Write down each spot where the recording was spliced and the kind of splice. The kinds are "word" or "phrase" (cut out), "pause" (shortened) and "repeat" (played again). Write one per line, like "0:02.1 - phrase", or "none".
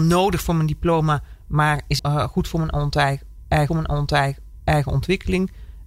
0:02.0 - word
0:03.7 - repeat